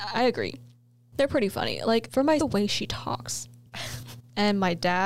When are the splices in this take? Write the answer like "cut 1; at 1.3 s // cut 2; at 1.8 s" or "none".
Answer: cut 1; at 2.4 s